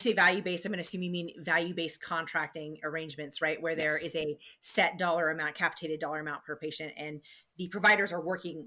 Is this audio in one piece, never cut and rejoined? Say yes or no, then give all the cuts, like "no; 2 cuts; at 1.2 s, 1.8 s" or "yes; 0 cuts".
yes; 0 cuts